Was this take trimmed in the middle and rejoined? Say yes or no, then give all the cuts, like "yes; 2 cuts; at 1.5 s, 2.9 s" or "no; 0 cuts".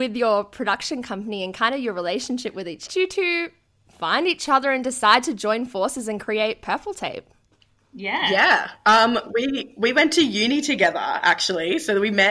yes; 1 cut; at 2.9 s